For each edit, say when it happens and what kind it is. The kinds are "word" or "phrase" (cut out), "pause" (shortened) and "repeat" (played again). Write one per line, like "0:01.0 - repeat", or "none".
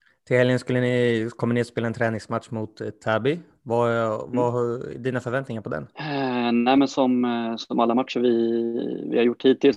0:05.9 - pause